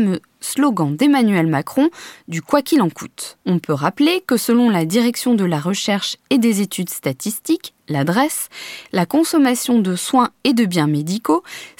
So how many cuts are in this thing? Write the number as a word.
one